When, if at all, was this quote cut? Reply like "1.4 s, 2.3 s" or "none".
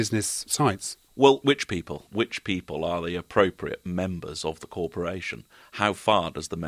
none

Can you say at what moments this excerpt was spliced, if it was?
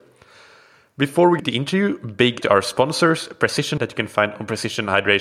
1.4 s, 2.4 s, 3.8 s

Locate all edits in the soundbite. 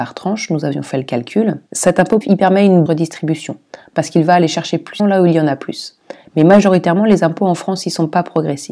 1.7 s, 2.2 s, 2.9 s, 5.0 s

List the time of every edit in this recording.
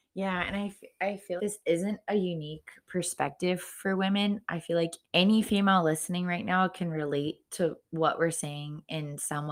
1.4 s, 5.0 s, 7.5 s

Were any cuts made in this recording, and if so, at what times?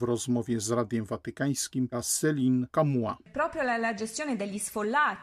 1.9 s

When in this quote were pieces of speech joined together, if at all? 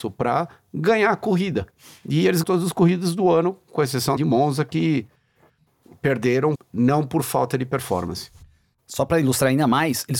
2.4 s, 4.2 s, 6.6 s

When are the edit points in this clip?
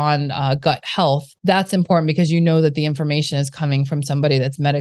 1.4 s

